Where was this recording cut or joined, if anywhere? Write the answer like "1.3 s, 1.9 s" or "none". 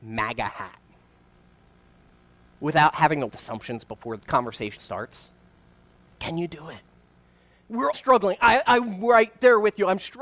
3.3 s, 4.2 s, 4.8 s, 7.9 s